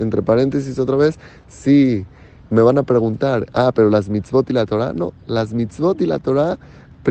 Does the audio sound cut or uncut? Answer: uncut